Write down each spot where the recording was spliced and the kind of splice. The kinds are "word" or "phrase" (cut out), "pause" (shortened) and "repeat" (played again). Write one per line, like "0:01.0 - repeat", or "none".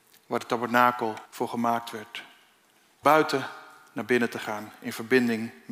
0:01.3 - pause
0:03.0 - word